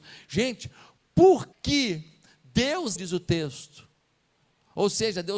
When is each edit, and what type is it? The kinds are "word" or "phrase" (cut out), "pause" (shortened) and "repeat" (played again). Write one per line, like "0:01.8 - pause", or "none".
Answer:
0:01.5 - word
0:03.0 - word